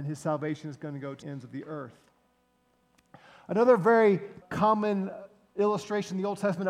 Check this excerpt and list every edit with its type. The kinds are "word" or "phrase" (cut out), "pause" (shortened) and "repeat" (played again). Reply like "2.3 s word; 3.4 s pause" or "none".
1.2 s word; 4.4 s word